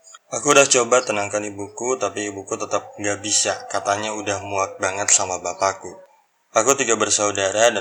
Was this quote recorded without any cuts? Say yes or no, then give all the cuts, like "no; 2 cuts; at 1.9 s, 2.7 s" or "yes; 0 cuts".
yes; 0 cuts